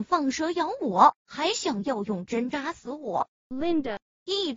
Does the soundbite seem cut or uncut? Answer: cut